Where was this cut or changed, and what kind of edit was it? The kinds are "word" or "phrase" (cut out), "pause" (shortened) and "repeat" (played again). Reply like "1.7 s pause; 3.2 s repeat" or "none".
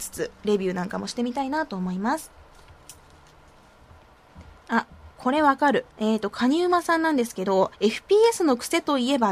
5.1 s pause; 5.9 s pause; 7.7 s pause